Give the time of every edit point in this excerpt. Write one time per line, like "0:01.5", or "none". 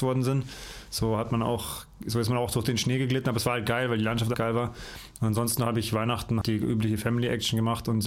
0:04.3
0:06.4